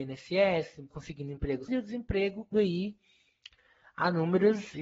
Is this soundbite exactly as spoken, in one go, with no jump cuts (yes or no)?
no